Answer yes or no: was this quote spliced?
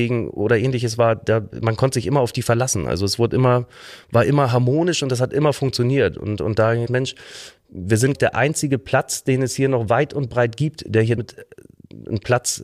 yes